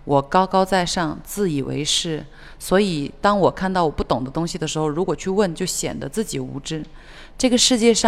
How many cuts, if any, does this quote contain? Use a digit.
0